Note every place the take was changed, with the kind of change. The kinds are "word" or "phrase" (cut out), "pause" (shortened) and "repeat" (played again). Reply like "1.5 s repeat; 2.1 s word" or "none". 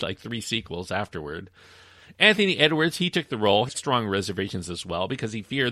3.7 s word